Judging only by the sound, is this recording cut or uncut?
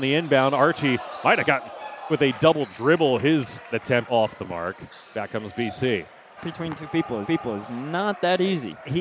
cut